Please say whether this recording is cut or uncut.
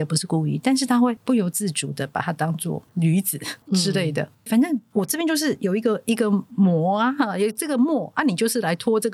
cut